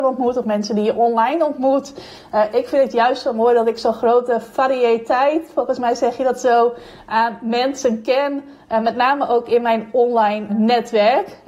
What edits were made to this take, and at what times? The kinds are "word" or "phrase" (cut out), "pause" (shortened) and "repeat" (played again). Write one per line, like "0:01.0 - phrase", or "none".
0:10.5 - word